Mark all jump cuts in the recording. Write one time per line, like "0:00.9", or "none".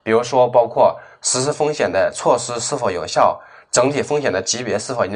none